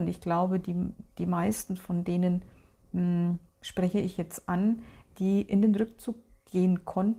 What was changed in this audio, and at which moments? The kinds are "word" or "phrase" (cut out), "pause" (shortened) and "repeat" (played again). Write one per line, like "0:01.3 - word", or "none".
0:01.1 - pause